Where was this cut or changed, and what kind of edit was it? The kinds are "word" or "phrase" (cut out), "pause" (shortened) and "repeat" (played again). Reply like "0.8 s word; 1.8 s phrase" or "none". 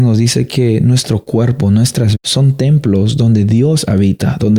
2.1 s word